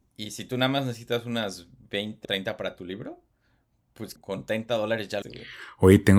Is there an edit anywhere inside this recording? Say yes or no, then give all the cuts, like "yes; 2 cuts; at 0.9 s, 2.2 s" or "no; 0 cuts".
yes; 3 cuts; at 2.2 s, 4.2 s, 5.2 s